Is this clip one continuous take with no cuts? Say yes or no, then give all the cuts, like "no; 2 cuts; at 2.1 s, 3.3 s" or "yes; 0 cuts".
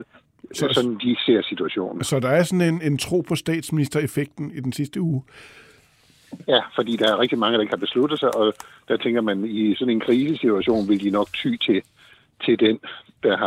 yes; 0 cuts